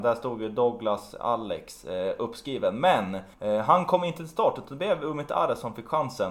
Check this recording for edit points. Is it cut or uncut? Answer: cut